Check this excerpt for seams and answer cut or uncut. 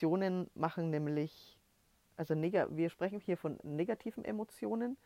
uncut